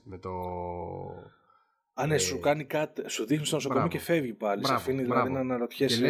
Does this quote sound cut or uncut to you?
uncut